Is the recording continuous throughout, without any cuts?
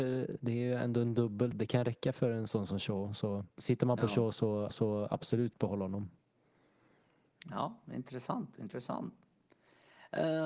no; 3 cuts; at 1.5 s, 3.5 s, 4.7 s

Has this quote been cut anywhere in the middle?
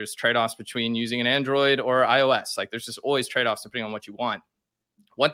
no; 0 cuts

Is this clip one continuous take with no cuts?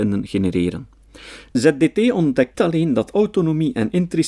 no; 1 cut; at 2.5 s

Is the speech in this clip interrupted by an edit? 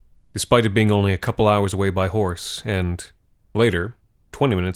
no; 0 cuts

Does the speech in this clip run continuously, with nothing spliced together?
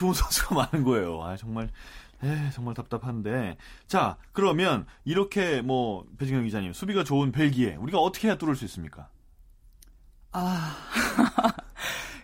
yes; 0 cuts

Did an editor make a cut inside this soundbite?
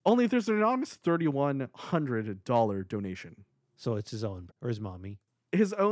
yes; 1 cut; at 4.5 s

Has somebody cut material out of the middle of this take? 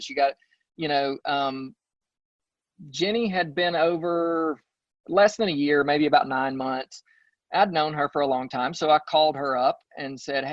no; 0 cuts

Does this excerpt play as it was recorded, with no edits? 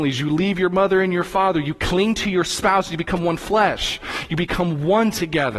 yes; 0 cuts

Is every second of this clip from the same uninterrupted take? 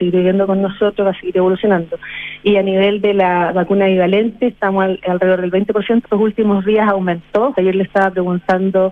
no; 2 cuts; at 6.0 s, 7.5 s

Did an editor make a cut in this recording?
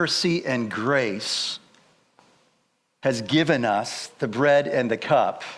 no; 0 cuts

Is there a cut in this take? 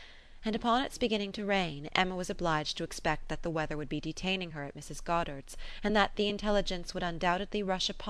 no; 0 cuts

